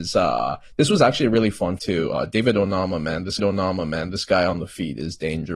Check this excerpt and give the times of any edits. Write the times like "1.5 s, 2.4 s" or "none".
1.8 s, 3.4 s